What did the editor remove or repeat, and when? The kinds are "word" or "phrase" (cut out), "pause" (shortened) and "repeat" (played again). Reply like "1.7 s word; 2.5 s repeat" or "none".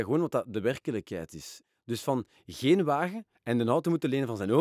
3.3 s pause

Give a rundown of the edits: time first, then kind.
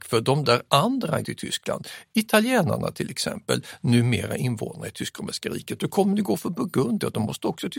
1.2 s word

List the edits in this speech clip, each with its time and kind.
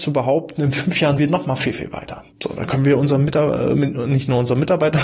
1.2 s word; 2.3 s pause

